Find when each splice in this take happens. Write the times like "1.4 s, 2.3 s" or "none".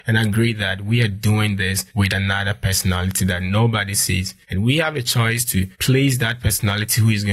1.9 s, 4.4 s, 5.7 s